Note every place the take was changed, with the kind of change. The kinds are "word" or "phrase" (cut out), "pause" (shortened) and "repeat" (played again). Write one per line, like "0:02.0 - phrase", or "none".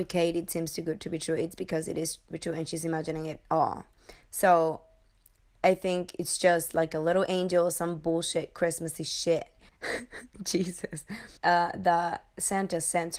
0:02.3 - phrase
0:09.7 - pause
0:11.4 - pause